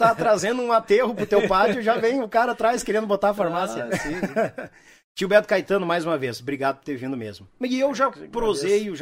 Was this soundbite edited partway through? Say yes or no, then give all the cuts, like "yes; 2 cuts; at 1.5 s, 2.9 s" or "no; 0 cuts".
no; 0 cuts